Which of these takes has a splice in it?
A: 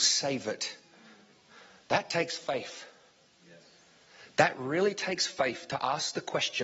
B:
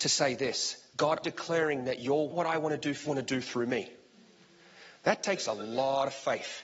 B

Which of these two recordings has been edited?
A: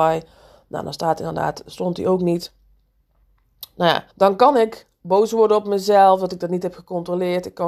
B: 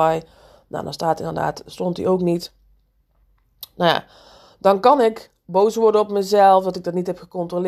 A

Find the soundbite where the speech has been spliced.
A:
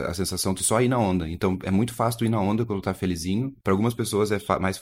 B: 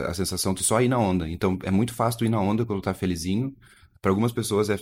A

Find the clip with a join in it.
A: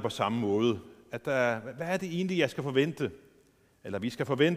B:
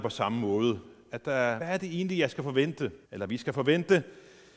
B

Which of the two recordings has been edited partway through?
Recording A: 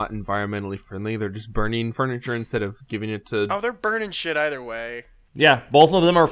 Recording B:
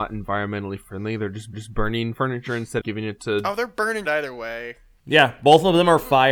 B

